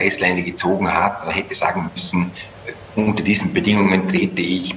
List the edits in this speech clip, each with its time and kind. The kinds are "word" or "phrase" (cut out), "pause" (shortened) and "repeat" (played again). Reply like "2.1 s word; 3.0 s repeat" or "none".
none